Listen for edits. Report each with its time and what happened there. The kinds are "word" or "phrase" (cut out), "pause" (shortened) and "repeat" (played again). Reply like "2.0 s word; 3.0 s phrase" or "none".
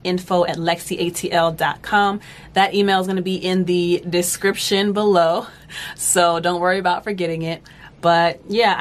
none